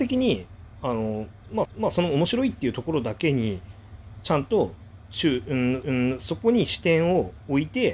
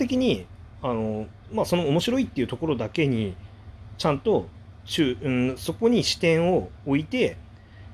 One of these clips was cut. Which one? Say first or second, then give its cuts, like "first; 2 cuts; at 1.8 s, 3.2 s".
first; 2 cuts; at 1.6 s, 5.8 s